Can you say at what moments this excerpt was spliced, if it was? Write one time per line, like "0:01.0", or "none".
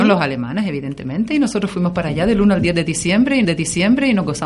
0:03.4